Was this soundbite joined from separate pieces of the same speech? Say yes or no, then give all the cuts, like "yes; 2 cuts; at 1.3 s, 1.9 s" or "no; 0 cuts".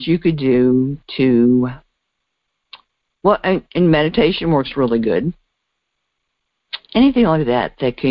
yes; 1 cut; at 2.9 s